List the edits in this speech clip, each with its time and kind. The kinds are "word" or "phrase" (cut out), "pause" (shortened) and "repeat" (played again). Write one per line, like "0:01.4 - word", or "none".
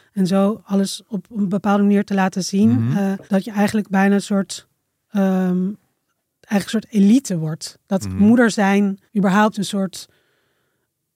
0:03.3 - pause
0:06.1 - pause
0:09.1 - pause